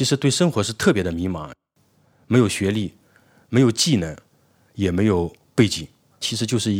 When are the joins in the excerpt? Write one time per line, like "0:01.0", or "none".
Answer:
none

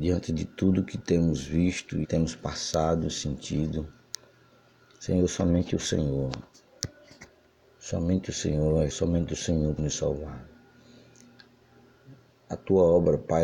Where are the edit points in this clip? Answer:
0:02.0
0:08.9
0:09.8

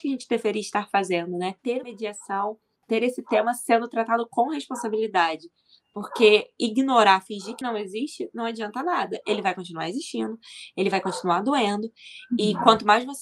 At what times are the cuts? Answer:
0:01.8
0:07.6

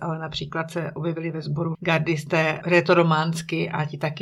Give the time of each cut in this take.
0:01.7
0:02.6

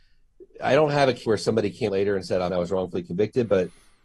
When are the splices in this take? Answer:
0:01.2
0:01.9
0:02.5

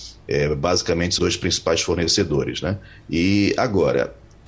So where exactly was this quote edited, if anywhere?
0:01.2

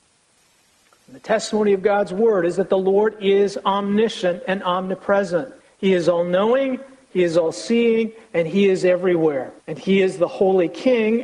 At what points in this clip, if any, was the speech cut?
0:05.6
0:09.6

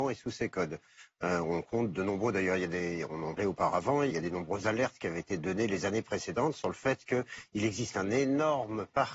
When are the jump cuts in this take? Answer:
0:03.4
0:04.1

